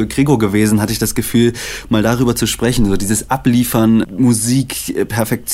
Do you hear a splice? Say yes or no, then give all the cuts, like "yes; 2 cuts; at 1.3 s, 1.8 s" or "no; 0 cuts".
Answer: no; 0 cuts